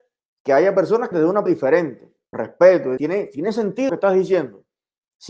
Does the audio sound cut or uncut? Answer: cut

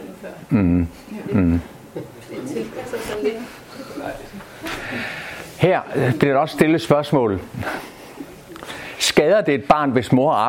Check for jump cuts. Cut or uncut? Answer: uncut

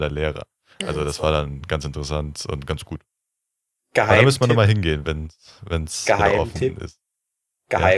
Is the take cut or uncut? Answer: uncut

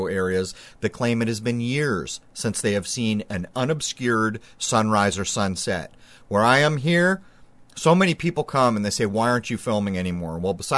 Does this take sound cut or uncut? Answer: uncut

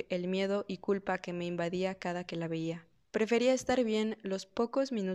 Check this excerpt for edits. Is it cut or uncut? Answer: cut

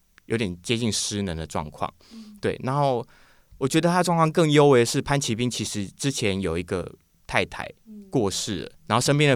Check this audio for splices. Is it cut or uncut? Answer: uncut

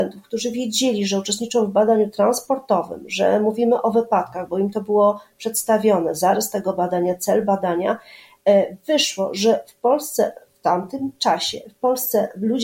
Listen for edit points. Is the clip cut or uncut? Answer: uncut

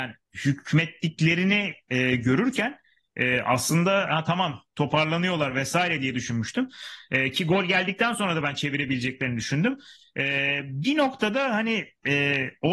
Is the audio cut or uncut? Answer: uncut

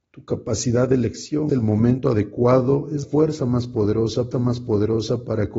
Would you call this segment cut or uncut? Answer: cut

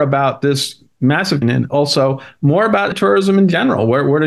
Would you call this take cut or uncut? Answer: cut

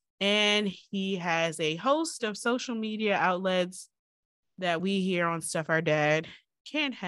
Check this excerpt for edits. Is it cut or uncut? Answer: uncut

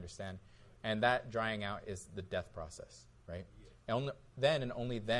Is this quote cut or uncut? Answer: uncut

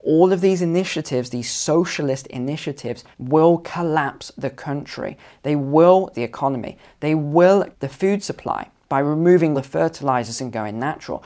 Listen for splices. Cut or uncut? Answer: cut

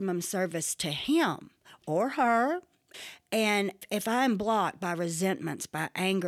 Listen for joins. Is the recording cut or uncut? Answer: uncut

